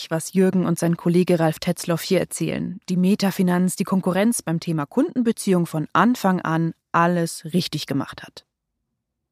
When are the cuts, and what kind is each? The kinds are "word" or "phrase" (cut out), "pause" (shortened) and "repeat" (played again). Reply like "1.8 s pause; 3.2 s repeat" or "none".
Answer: 2.8 s pause; 3.8 s phrase